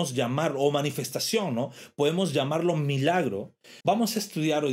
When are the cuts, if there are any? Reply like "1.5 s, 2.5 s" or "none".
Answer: 3.8 s